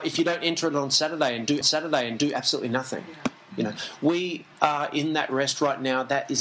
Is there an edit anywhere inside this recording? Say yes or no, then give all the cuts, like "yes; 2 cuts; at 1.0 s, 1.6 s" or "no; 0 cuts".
yes; 1 cut; at 1.6 s